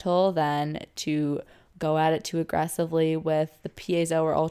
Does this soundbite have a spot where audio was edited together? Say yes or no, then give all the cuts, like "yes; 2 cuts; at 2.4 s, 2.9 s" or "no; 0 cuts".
no; 0 cuts